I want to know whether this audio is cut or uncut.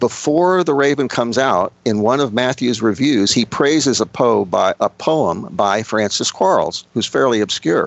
cut